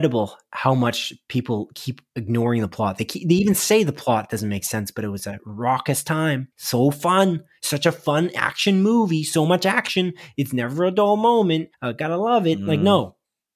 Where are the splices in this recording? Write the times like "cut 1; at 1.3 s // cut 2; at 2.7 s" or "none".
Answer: cut 1; at 6.5 s // cut 2; at 11.7 s